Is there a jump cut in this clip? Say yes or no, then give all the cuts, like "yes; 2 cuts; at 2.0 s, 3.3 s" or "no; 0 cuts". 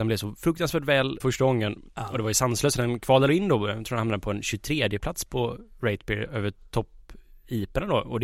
yes; 1 cut; at 1.2 s